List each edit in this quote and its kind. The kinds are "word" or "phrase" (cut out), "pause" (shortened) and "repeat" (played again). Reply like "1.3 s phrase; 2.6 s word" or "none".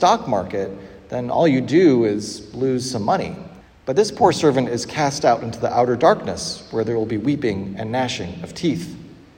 3.6 s pause